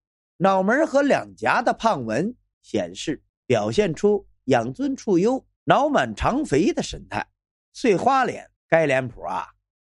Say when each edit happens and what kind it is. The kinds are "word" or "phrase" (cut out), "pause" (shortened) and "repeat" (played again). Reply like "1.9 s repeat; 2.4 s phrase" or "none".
8.6 s pause